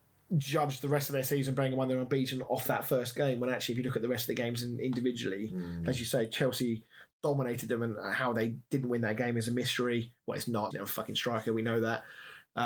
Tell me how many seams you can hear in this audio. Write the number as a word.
one